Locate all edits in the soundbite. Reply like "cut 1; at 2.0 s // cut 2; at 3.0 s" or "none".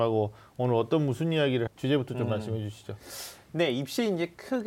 cut 1; at 1.7 s